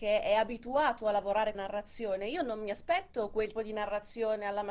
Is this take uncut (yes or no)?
no